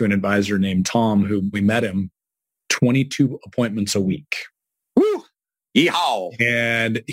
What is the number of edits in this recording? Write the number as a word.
one